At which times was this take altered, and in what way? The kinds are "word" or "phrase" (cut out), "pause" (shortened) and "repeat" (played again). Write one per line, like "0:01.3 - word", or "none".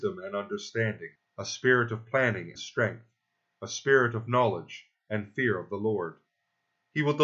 0:01.1 - pause
0:02.6 - word

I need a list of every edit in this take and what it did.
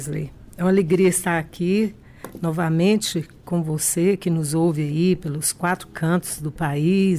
none

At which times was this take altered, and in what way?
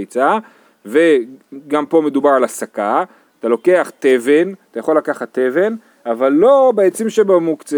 none

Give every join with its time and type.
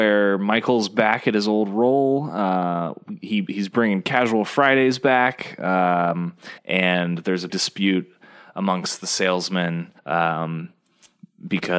0:06.6 - pause
0:07.5 - word
0:10.0 - pause

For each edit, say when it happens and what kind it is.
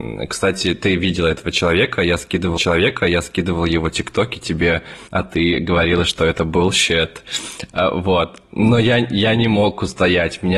0:02.6 - repeat
0:05.1 - pause

